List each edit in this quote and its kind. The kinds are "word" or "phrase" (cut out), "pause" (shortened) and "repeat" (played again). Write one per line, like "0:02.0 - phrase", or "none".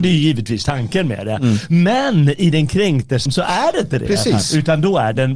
0:03.3 - word